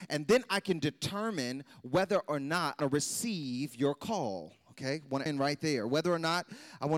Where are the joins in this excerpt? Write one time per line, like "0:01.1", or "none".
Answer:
0:02.8
0:05.3